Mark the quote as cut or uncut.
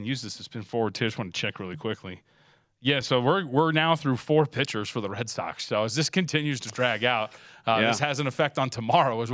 uncut